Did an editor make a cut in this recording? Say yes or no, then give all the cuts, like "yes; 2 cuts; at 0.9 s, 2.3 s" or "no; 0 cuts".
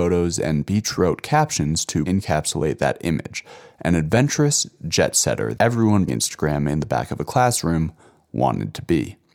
yes; 3 cuts; at 2.1 s, 5.6 s, 6.1 s